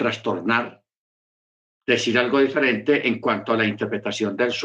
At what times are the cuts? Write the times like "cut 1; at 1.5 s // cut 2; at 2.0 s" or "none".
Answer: none